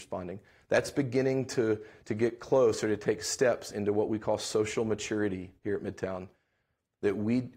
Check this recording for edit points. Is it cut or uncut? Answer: uncut